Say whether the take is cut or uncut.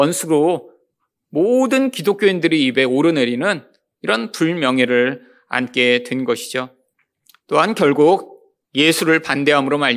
uncut